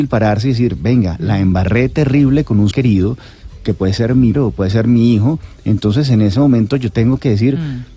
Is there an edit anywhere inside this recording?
yes; 2 cuts; at 2.7 s, 4.3 s

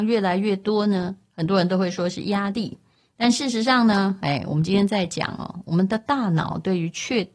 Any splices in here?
no; 0 cuts

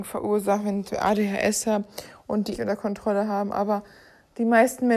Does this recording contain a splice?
yes; 2 cuts; at 0.9 s, 2.5 s

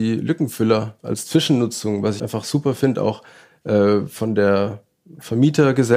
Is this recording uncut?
no; 2 cuts; at 1.0 s, 2.2 s

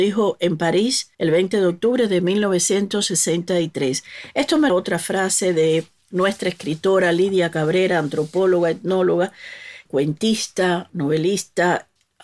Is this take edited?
yes; 3 cuts; at 1.1 s, 4.7 s, 9.9 s

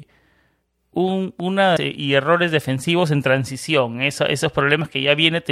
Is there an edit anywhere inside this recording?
yes; 1 cut; at 1.8 s

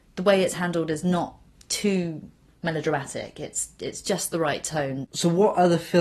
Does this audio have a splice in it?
no; 0 cuts

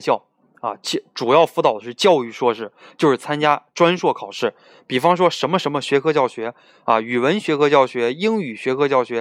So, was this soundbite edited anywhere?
no; 0 cuts

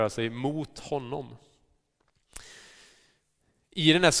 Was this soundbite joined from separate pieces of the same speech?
no; 0 cuts

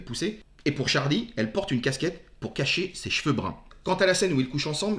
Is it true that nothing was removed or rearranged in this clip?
yes; 0 cuts

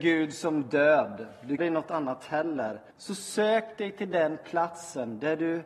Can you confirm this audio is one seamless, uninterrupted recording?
no; 2 cuts; at 1.6 s, 2.9 s

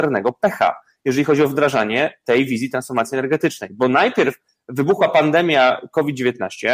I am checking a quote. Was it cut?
no; 0 cuts

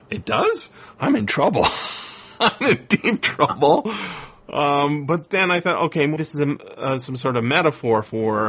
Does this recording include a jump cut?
yes; 1 cut; at 6.2 s

